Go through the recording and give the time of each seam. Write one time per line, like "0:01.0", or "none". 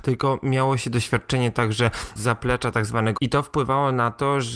0:02.2
0:03.2